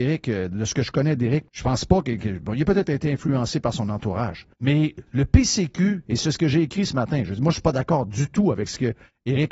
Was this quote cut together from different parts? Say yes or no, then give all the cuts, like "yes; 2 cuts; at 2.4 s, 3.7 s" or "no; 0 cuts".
yes; 2 cuts; at 1.5 s, 4.5 s